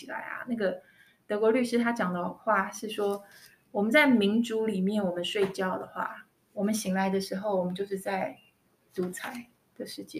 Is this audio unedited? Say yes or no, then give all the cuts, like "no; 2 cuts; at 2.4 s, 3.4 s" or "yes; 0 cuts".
yes; 0 cuts